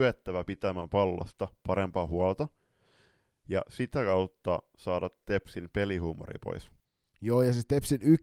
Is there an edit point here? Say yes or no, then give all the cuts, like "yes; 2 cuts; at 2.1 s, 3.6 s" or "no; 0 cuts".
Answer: no; 0 cuts